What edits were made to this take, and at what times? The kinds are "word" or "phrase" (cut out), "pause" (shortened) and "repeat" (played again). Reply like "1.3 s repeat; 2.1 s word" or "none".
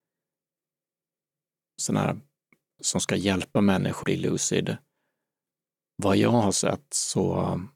1.8 s word; 2.8 s word; 4.0 s word